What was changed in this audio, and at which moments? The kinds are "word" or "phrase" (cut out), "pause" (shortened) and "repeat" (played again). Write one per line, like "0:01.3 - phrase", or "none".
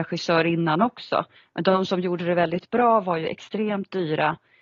0:01.4 - pause